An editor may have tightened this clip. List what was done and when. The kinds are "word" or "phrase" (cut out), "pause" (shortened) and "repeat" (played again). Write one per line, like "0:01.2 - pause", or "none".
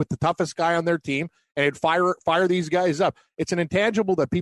none